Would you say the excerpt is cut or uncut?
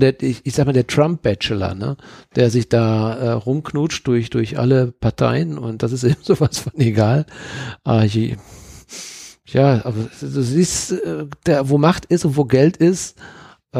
uncut